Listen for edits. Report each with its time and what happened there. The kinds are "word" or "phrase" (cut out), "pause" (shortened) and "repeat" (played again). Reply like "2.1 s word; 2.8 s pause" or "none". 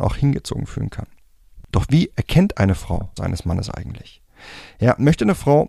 3.2 s phrase